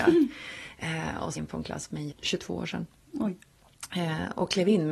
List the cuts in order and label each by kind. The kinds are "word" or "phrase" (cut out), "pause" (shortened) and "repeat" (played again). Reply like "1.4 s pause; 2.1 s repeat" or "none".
1.4 s word; 2.1 s word

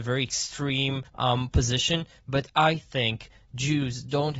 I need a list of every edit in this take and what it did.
1.1 s pause

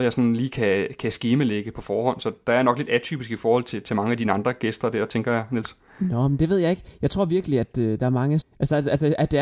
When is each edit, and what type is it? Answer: 8.4 s word

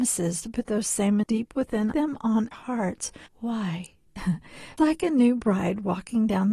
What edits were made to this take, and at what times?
1.2 s word; 1.9 s phrase; 2.5 s word; 3.3 s pause; 4.8 s word

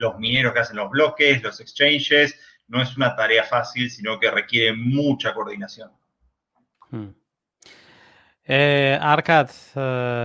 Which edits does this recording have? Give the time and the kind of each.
none

